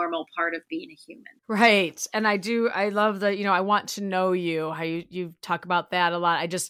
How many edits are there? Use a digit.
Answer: 1